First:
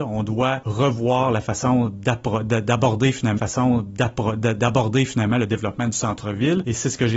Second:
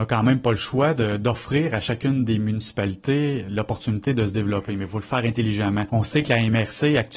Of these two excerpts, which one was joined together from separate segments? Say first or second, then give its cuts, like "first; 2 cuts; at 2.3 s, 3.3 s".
first; 1 cut; at 3.4 s